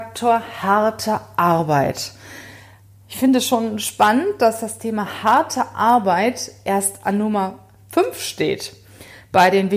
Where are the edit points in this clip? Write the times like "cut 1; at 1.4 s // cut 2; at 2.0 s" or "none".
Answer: none